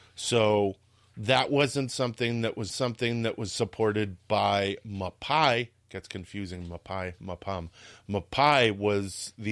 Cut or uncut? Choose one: cut